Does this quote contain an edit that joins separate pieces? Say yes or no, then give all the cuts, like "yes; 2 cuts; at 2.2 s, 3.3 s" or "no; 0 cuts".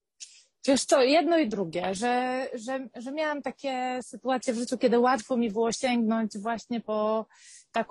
no; 0 cuts